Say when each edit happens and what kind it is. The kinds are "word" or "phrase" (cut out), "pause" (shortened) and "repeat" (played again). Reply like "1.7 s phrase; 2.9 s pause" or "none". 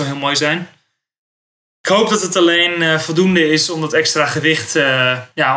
none